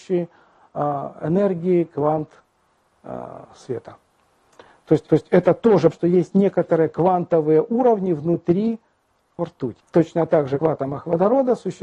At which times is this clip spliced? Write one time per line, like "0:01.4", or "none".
0:05.1
0:05.9
0:09.4
0:09.8
0:10.6